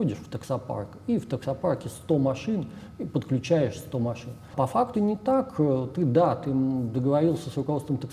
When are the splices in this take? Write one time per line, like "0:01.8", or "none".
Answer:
0:04.9